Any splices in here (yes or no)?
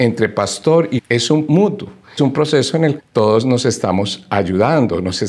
yes